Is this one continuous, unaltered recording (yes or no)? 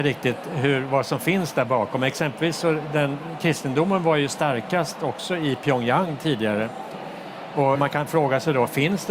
no